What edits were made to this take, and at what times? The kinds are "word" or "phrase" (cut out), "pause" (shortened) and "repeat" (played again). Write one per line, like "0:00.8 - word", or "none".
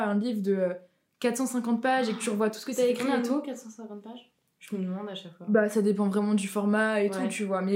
none